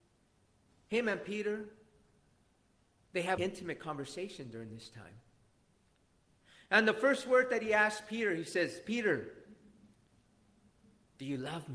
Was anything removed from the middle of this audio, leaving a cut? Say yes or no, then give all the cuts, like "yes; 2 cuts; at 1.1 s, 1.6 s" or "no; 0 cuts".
yes; 1 cut; at 3.4 s